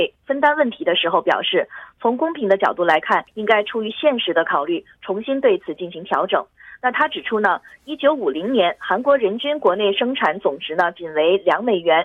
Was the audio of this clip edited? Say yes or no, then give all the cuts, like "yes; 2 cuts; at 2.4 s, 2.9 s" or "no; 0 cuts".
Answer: yes; 1 cut; at 3.3 s